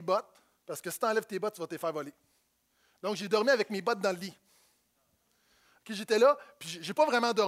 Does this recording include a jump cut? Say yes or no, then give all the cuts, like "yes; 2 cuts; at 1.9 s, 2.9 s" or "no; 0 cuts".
no; 0 cuts